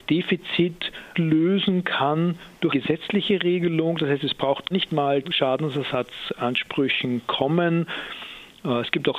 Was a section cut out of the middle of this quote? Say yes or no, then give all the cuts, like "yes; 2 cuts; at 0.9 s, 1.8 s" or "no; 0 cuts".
yes; 4 cuts; at 1.1 s, 2.7 s, 4.7 s, 5.2 s